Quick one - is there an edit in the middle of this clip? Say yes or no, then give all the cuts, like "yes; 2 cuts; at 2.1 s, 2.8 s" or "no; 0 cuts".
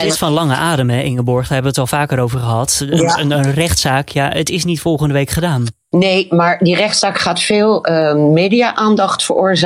no; 0 cuts